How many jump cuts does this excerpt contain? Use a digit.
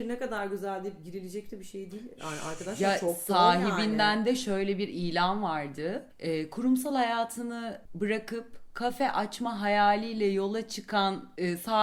0